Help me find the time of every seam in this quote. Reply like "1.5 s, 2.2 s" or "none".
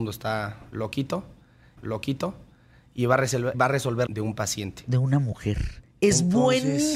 1.8 s, 3.5 s, 4.1 s